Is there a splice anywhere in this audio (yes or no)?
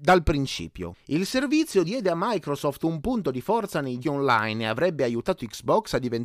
yes